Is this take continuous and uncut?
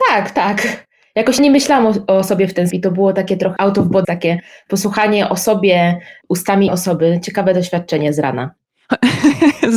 no; 5 cuts; at 1.4 s, 2.7 s, 3.6 s, 4.0 s, 6.7 s

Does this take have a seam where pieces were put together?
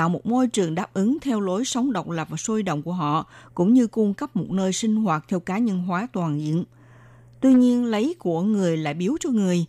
no; 0 cuts

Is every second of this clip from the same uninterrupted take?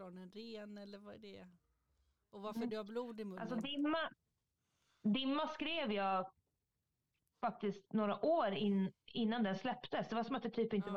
yes; 0 cuts

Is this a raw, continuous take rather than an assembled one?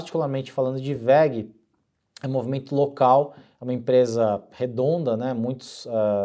yes; 0 cuts

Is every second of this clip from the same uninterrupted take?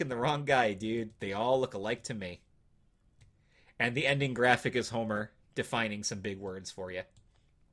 yes; 0 cuts

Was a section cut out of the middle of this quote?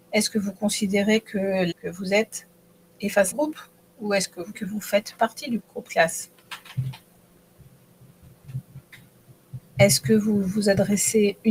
yes; 4 cuts; at 1.7 s, 3.3 s, 4.5 s, 5.6 s

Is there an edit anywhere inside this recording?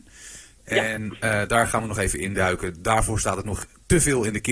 no; 0 cuts

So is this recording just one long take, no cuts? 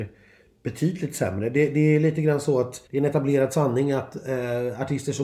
no; 1 cut; at 2.9 s

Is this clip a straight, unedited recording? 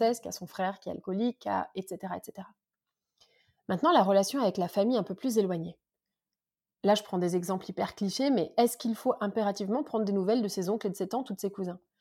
yes; 0 cuts

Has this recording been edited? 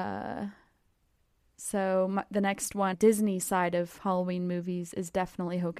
yes; 1 cut; at 2.9 s

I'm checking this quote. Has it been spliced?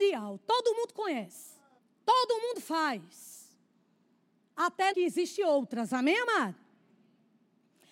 yes; 2 cuts; at 1.8 s, 4.9 s

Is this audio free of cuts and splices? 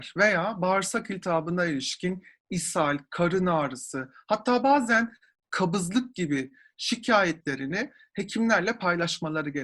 yes; 0 cuts

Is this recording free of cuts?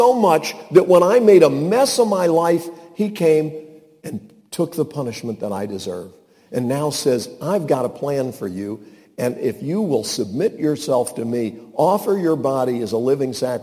yes; 0 cuts

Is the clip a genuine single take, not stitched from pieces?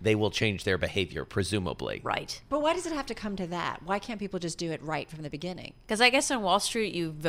yes; 0 cuts

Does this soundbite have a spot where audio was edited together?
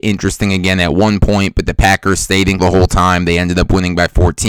yes; 1 cut; at 2.6 s

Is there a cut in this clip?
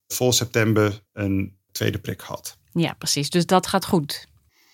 yes; 1 cut; at 1.1 s

